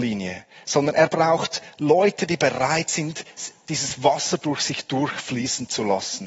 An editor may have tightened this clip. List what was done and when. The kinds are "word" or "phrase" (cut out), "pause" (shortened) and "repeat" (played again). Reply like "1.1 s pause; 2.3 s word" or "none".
none